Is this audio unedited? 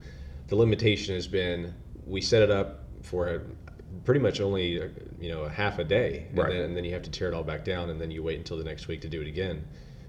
yes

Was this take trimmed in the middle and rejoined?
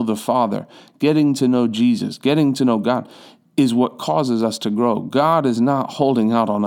no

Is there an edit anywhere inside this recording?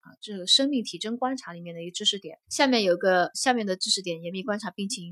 yes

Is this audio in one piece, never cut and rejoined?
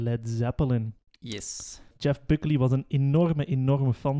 yes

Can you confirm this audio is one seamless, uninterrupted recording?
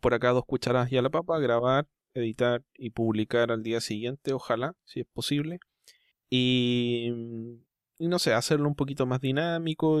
yes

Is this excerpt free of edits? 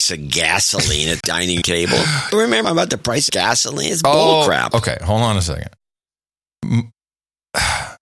no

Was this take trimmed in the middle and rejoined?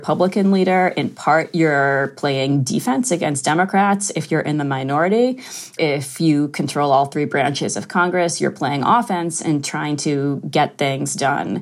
yes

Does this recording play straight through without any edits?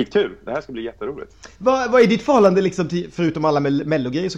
yes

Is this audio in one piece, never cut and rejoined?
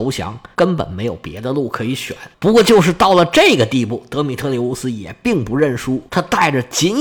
no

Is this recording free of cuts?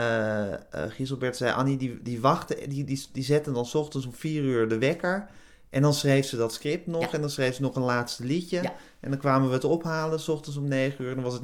yes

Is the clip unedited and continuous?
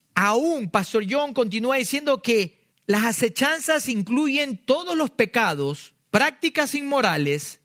no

